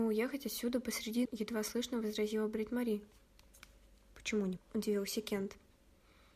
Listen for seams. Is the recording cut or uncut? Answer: cut